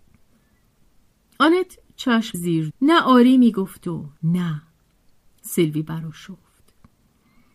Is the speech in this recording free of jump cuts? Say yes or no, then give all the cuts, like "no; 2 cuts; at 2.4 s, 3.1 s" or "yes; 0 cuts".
no; 3 cuts; at 2.3 s, 2.7 s, 4.2 s